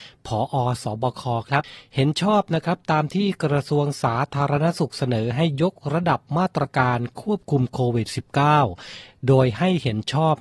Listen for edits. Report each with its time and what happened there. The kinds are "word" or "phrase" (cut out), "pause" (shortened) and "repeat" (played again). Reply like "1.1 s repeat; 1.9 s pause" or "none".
none